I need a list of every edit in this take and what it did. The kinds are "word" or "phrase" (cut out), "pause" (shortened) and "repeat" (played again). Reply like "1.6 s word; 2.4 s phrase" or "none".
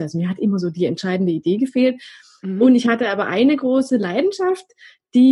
none